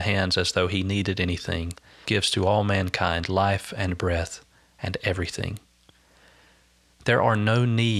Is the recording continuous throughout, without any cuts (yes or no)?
no